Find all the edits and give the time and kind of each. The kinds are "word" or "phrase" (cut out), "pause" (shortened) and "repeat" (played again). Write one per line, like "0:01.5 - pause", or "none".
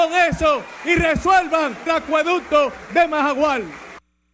0:01.9 - word